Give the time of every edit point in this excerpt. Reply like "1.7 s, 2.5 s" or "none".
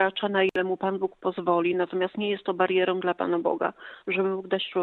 none